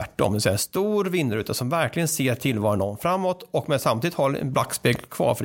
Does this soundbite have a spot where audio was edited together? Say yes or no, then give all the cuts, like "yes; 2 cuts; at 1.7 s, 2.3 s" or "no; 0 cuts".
no; 0 cuts